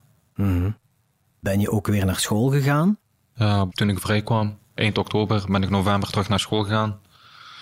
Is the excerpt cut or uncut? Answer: uncut